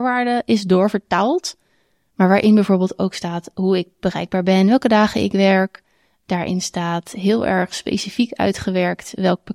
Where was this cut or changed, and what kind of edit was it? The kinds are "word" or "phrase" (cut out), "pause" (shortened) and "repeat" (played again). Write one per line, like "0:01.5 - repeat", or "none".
none